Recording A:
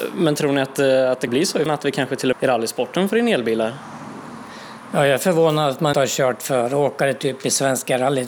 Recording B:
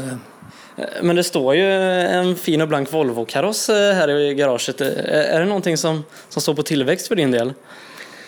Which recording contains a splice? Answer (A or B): A